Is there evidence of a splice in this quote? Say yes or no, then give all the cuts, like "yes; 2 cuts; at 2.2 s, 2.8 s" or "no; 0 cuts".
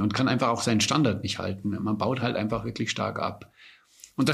no; 0 cuts